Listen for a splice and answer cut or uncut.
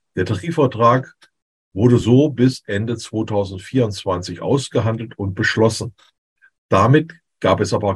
uncut